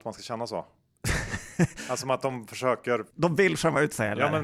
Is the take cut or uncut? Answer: cut